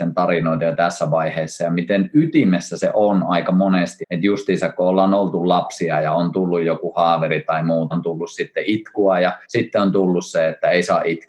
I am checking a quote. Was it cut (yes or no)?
yes